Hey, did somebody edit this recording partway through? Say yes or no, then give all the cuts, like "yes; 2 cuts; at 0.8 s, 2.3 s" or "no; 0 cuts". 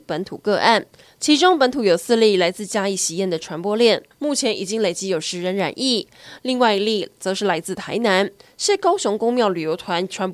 no; 0 cuts